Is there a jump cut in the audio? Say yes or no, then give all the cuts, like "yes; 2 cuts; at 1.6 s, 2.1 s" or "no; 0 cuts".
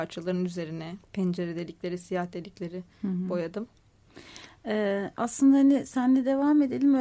yes; 1 cut; at 1.0 s